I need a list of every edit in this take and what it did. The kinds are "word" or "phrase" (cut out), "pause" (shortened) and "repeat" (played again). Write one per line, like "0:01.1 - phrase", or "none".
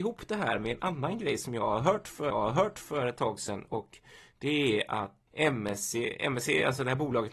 0:02.3 - repeat
0:05.3 - word